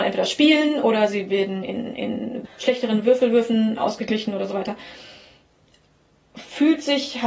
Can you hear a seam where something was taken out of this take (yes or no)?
no